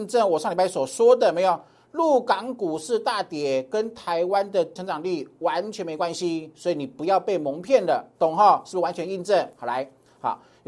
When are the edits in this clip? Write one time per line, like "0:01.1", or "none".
0:04.8